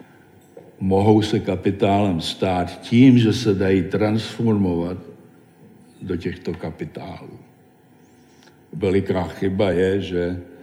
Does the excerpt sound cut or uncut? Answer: uncut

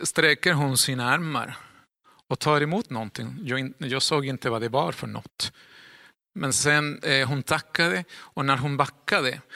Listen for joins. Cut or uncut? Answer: uncut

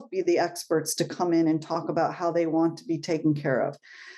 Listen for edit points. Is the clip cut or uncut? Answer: uncut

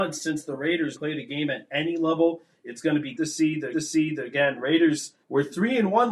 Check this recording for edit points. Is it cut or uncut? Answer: cut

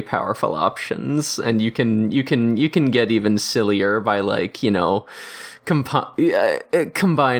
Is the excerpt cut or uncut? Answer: uncut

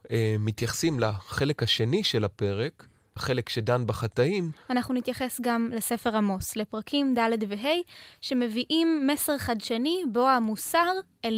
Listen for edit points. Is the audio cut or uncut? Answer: cut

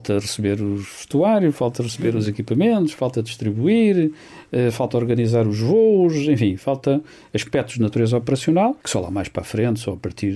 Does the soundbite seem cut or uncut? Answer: cut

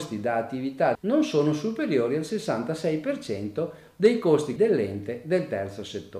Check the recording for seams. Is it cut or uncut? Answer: cut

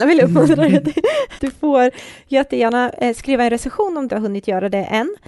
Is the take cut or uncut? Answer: cut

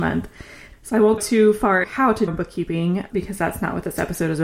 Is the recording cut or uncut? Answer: cut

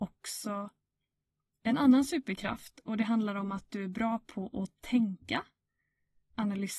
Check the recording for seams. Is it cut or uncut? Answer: uncut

